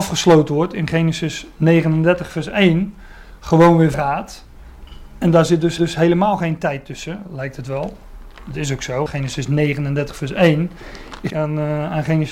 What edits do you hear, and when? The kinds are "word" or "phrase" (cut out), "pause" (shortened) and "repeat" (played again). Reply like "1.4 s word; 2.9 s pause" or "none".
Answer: 3.9 s word; 5.8 s repeat; 9.1 s word; 11.3 s phrase